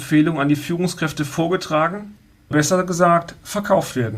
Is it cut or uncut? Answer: cut